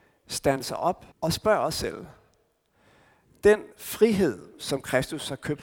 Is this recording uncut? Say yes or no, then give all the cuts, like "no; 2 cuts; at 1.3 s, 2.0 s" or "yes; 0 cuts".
no; 2 cuts; at 1.1 s, 3.7 s